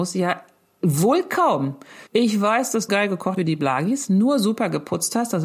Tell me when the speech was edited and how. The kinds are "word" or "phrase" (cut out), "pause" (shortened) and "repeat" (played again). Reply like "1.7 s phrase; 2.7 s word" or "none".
2.1 s pause; 2.9 s phrase; 3.4 s phrase